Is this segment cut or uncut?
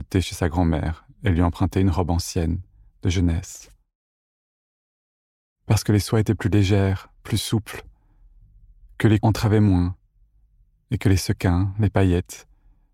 cut